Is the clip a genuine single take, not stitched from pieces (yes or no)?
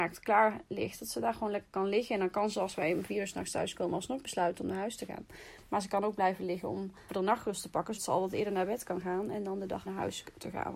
no